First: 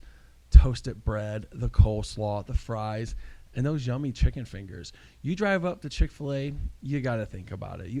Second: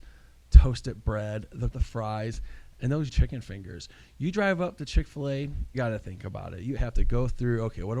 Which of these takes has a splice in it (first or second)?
second